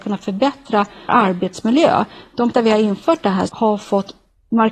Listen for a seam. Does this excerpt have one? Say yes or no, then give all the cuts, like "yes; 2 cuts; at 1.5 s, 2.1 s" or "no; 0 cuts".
yes; 3 cuts; at 1.1 s, 2.5 s, 3.5 s